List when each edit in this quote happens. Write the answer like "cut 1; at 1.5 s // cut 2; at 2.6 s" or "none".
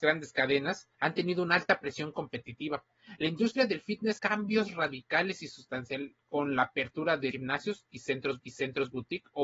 cut 1; at 0.9 s // cut 2; at 4.2 s // cut 3; at 7.3 s // cut 4; at 8.4 s